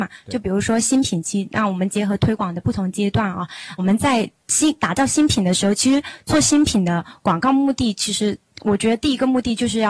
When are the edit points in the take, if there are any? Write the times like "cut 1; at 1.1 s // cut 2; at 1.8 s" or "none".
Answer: cut 1; at 3.8 s